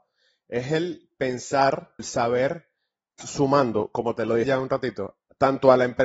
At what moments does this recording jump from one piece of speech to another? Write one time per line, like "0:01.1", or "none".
0:02.0
0:03.2
0:04.4